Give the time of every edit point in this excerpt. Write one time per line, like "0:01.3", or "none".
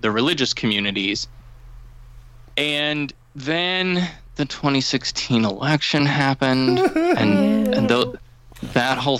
none